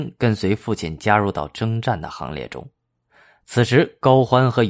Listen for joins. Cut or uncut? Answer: uncut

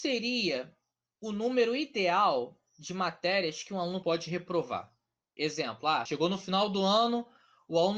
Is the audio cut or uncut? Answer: uncut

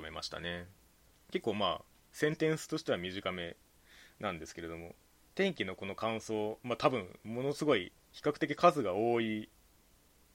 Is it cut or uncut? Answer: uncut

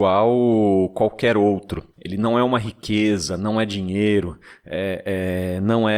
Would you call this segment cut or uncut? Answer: cut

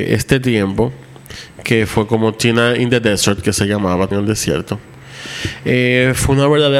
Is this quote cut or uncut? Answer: cut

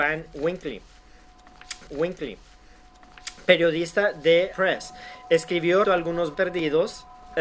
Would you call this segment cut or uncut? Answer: cut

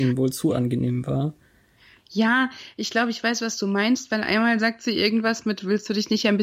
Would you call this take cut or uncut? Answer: uncut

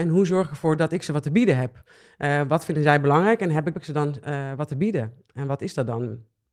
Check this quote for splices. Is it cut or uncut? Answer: cut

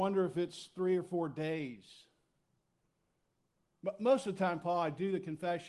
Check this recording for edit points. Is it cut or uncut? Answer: uncut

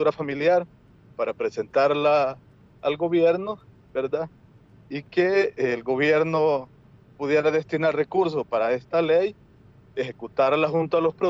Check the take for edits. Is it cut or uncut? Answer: uncut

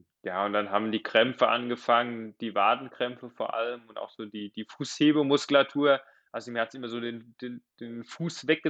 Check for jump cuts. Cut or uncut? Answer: uncut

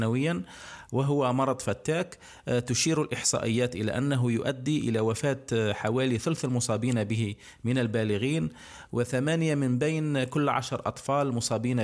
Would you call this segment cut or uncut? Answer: uncut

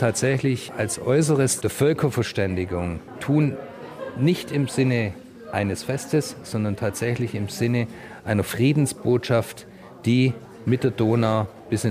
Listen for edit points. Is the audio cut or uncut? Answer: cut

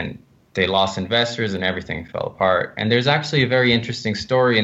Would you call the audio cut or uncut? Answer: uncut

